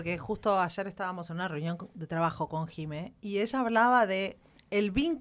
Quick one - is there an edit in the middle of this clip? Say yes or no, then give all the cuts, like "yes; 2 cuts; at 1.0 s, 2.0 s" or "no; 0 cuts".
no; 0 cuts